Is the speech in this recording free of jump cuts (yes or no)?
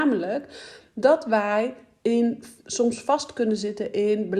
yes